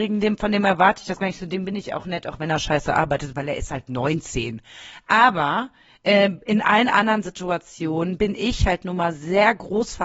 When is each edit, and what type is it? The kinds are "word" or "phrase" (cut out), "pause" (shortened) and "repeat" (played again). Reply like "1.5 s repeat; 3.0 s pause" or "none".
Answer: none